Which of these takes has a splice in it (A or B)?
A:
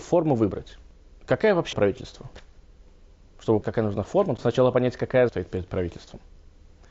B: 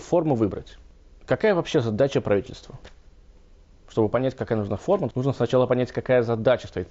A